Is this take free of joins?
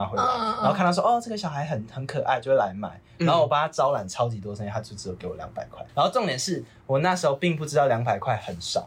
no; 1 cut; at 5.9 s

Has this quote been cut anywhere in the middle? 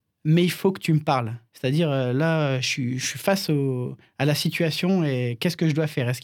yes; 1 cut; at 1.5 s

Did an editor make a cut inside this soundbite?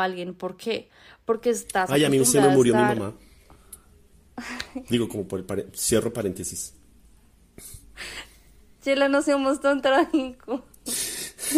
no; 0 cuts

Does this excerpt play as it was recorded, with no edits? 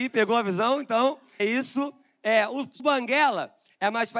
no; 2 cuts; at 1.4 s, 2.8 s

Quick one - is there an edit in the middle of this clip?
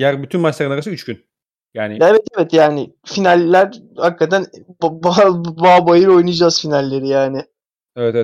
no; 0 cuts

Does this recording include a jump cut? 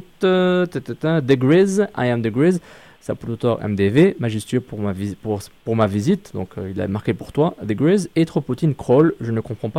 no; 0 cuts

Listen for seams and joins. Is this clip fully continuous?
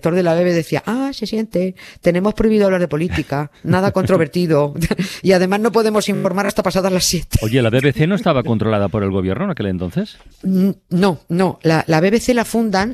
no; 1 cut; at 10.3 s

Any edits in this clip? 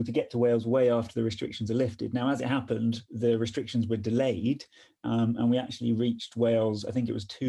no; 0 cuts

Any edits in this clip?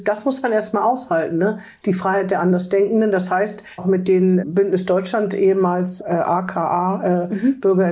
yes; 3 cuts; at 3.8 s, 4.4 s, 6.0 s

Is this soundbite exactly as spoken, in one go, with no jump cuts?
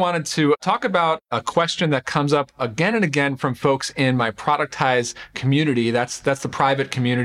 yes; 0 cuts

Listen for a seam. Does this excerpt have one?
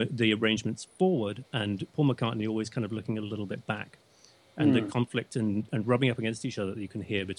no; 0 cuts

